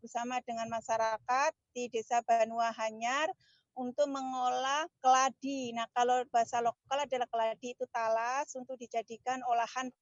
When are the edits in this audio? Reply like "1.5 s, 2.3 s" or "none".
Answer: none